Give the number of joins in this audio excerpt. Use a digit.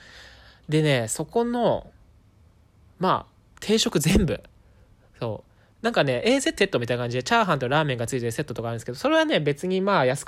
1